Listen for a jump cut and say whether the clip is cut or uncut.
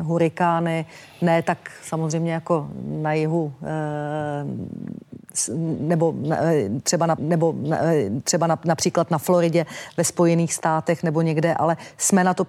cut